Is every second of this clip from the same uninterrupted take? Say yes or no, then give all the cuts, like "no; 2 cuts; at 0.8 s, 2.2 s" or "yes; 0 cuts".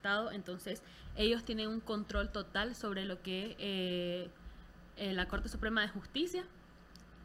yes; 0 cuts